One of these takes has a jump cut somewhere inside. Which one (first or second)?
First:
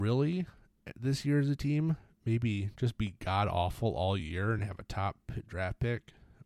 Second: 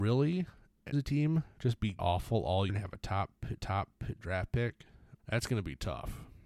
second